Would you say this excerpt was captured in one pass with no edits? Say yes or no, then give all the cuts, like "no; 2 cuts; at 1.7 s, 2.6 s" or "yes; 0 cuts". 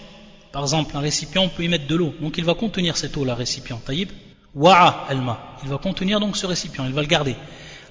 no; 1 cut; at 4.3 s